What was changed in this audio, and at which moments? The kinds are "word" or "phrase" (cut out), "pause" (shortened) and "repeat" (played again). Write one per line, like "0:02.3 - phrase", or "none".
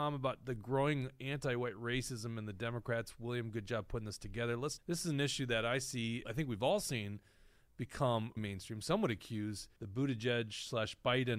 0:04.8 - phrase
0:06.2 - word
0:08.4 - word
0:09.8 - pause